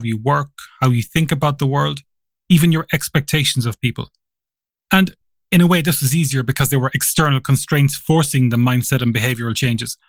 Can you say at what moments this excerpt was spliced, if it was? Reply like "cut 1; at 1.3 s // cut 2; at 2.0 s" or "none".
none